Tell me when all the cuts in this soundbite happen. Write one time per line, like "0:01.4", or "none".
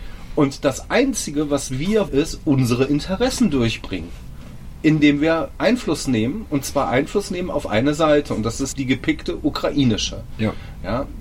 0:02.1
0:08.7